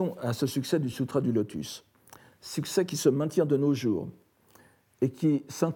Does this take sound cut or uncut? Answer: uncut